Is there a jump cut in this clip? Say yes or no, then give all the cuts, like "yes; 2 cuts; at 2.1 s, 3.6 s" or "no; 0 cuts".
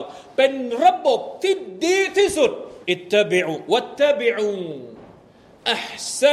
yes; 1 cut; at 2.8 s